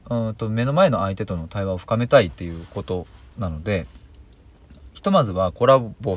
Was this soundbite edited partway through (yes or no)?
yes